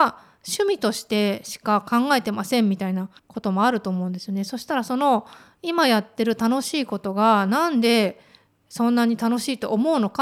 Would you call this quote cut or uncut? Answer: cut